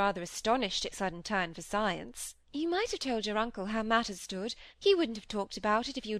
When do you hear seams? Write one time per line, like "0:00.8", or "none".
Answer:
0:00.9
0:02.4
0:04.2
0:04.7